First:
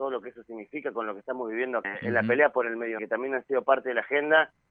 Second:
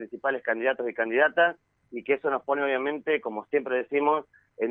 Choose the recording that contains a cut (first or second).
first